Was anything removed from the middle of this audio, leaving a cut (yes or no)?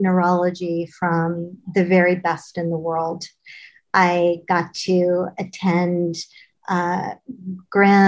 no